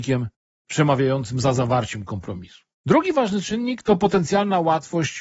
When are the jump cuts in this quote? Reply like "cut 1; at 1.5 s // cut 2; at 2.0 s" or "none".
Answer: cut 1; at 2.7 s

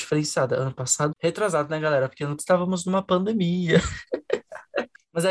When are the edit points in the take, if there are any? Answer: cut 1; at 1.1 s // cut 2; at 2.4 s

